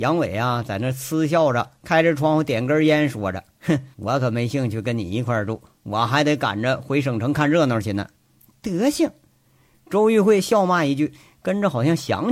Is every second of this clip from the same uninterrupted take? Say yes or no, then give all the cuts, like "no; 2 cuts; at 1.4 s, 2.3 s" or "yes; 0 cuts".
no; 2 cuts; at 3.9 s, 8.1 s